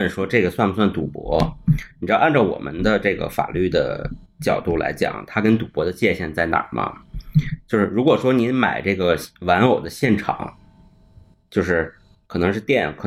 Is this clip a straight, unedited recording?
yes; 0 cuts

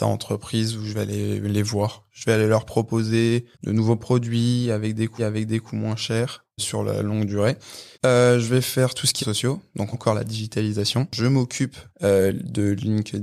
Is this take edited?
yes; 7 cuts; at 3.5 s, 5.2 s, 6.6 s, 7.9 s, 9.2 s, 9.9 s, 11.9 s

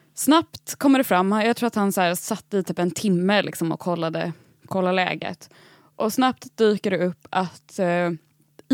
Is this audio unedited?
yes; 0 cuts

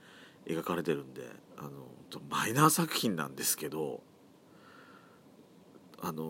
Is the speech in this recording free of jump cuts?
no; 1 cut; at 1.5 s

